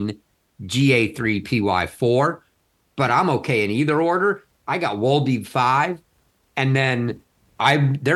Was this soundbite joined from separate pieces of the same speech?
no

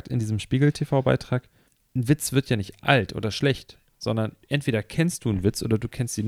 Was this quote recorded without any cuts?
no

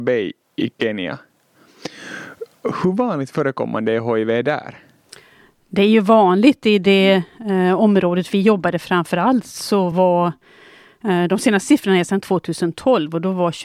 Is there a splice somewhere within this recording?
no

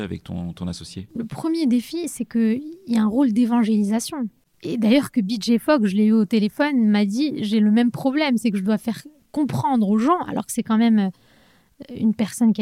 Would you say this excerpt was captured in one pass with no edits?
yes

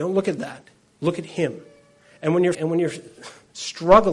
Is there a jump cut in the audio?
yes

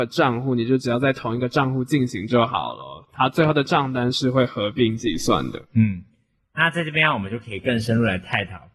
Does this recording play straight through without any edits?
no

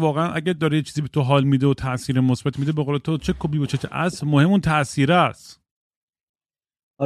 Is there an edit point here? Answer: no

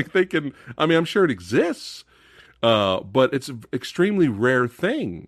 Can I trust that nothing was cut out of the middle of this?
yes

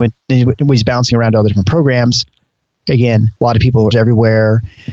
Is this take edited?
yes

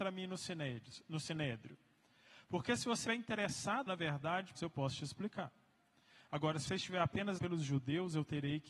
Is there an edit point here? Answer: yes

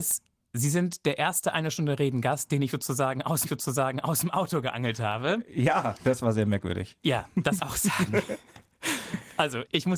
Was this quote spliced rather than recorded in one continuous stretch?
yes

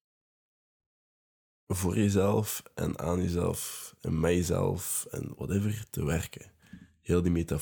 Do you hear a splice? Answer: no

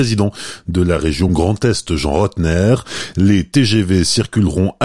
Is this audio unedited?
yes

